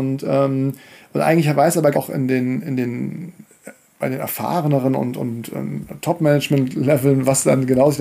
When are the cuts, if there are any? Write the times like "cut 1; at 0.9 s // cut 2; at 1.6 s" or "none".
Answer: cut 1; at 1.9 s